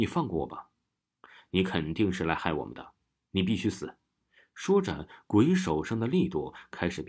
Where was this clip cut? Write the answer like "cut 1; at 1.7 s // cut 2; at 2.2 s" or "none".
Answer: none